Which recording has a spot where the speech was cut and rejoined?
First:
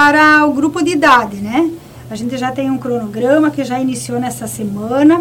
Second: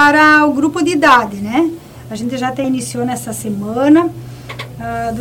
second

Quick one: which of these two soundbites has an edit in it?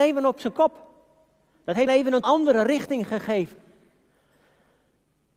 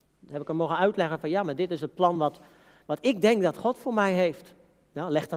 first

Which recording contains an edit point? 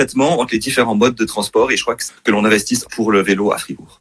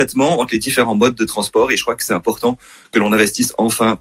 first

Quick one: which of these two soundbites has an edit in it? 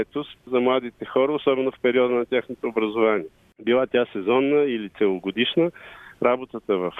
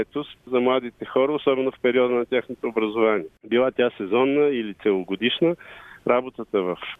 second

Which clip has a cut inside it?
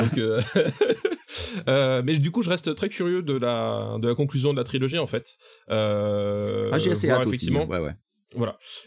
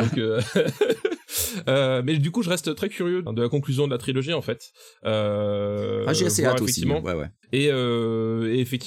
second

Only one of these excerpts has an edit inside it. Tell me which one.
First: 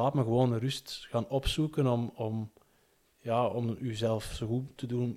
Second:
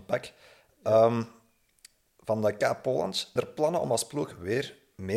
second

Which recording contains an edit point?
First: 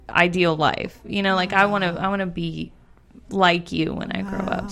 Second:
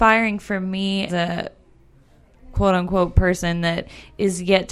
second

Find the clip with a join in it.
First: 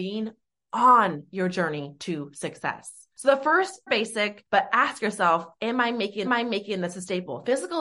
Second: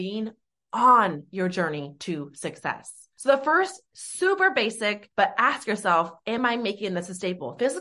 first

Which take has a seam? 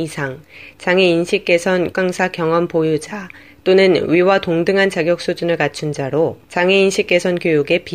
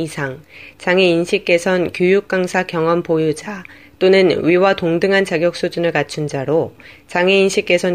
first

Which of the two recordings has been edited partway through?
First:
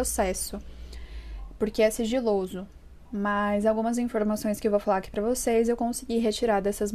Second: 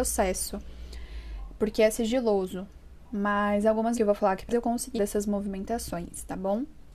second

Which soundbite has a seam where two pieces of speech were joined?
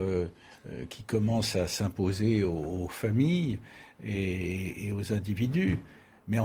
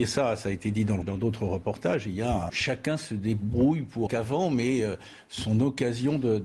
second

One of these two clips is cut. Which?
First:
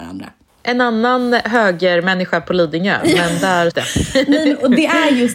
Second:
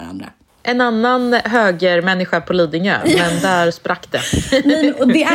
first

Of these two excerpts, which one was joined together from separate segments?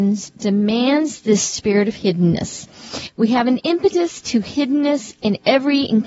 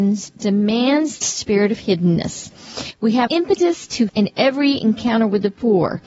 second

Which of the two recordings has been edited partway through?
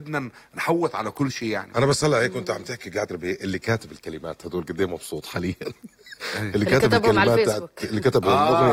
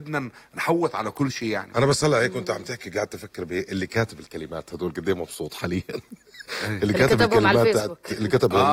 first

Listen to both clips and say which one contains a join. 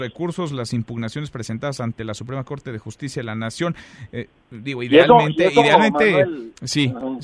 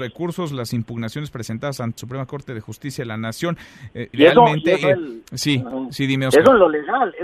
second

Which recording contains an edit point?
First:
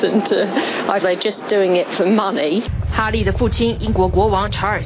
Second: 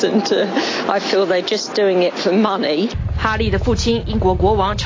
first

